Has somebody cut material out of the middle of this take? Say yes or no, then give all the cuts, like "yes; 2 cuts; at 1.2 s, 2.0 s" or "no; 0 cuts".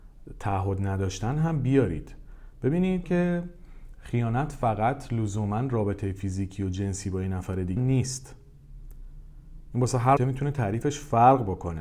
yes; 3 cuts; at 3.0 s, 7.8 s, 10.2 s